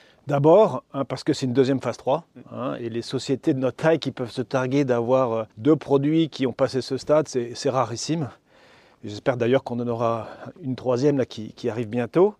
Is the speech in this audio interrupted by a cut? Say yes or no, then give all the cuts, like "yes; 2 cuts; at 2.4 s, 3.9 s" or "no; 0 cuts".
yes; 1 cut; at 5.5 s